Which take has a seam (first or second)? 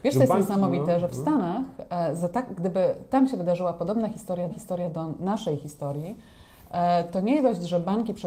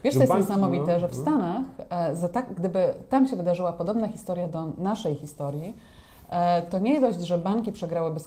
first